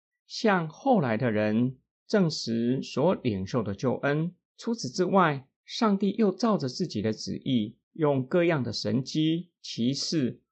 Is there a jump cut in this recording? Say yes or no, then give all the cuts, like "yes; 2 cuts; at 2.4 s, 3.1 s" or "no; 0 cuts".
yes; 2 cuts; at 4.4 s, 7.8 s